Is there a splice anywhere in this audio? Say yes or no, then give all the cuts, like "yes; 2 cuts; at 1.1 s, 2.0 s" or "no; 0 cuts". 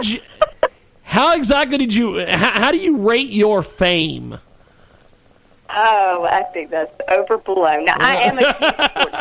no; 0 cuts